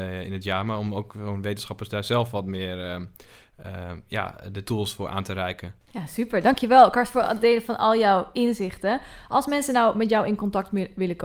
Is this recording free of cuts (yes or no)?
no